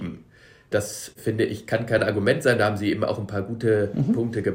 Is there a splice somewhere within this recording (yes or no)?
no